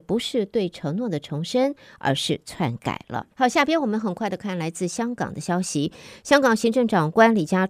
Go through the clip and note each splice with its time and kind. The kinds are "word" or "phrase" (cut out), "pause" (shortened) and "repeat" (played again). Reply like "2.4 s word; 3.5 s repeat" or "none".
3.3 s pause